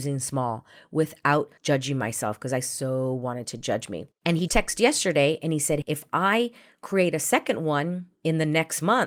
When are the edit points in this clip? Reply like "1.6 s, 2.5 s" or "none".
1.6 s, 4.1 s, 4.5 s, 5.8 s, 8.1 s